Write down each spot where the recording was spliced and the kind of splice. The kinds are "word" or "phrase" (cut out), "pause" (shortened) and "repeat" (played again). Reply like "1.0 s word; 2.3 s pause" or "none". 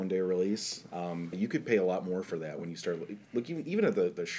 1.3 s word